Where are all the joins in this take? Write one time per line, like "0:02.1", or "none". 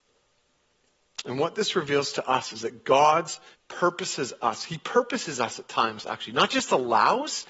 0:03.5